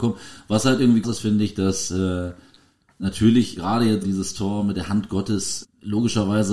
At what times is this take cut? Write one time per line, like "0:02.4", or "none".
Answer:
0:01.0
0:03.6
0:04.0
0:05.6